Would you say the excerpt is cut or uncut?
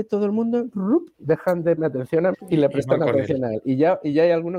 cut